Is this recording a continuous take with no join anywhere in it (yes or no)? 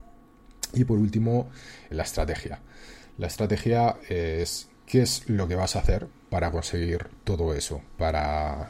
no